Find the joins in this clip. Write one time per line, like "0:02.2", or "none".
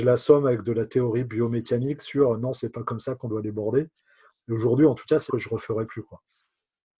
0:05.3